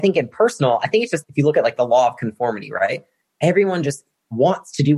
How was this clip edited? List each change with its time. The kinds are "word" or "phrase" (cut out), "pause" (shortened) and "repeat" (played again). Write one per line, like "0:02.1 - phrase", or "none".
0:01.2 - word